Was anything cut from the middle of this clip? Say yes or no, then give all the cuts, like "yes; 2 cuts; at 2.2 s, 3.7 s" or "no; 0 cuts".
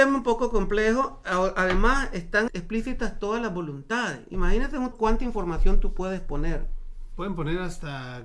yes; 2 cuts; at 2.5 s, 4.9 s